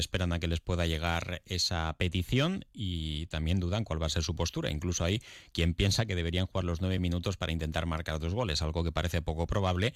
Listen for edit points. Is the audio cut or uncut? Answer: uncut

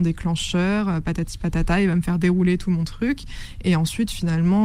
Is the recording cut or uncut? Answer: uncut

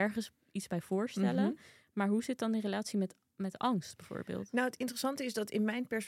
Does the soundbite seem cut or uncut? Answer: uncut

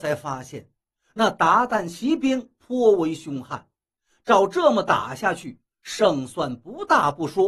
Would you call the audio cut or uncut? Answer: uncut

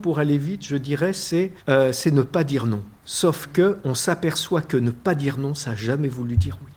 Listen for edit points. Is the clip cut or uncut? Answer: cut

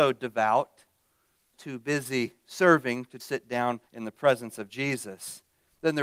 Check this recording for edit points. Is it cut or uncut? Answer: cut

